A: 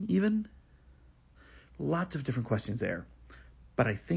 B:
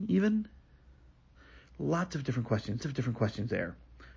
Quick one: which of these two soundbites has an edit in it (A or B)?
B